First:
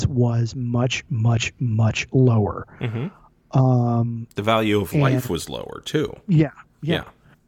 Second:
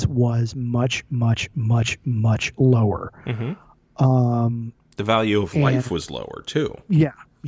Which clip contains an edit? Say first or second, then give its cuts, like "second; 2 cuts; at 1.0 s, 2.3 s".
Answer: first; 2 cuts; at 1.1 s, 4.3 s